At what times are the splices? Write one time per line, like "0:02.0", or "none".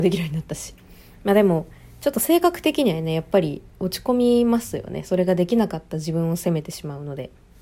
0:01.0